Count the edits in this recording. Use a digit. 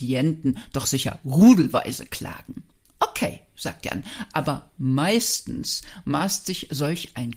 0